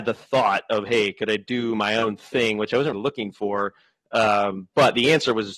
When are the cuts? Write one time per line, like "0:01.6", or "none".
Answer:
0:02.9